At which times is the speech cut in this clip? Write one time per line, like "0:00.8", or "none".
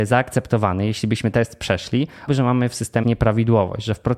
0:01.3
0:02.3
0:03.0